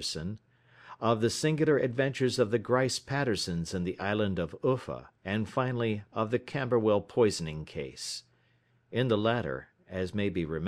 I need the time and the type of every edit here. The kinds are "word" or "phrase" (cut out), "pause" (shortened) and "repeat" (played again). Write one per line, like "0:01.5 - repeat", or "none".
0:05.2 - pause